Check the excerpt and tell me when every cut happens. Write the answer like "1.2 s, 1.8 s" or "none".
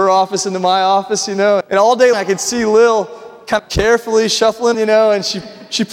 1.6 s, 2.1 s, 3.6 s, 4.7 s